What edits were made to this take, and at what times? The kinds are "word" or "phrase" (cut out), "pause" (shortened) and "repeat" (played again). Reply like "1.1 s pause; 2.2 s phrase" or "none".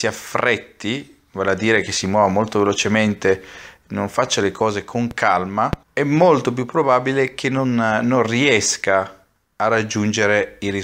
5.8 s pause